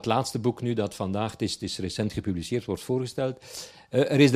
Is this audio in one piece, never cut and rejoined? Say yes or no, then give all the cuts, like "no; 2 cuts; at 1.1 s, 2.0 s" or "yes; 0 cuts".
yes; 0 cuts